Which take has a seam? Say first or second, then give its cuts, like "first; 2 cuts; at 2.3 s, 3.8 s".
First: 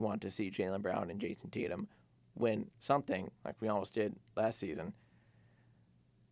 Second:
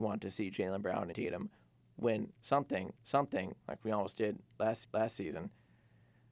second; 3 cuts; at 1.1 s, 3.0 s, 4.8 s